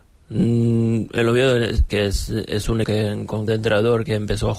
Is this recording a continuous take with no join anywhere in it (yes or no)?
no